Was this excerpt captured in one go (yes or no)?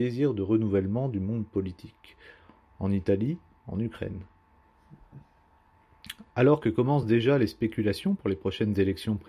yes